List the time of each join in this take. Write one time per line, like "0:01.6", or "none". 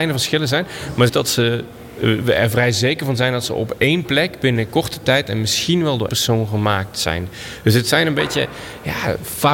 0:01.1
0:06.1